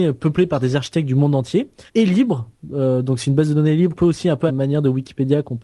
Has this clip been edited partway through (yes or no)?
yes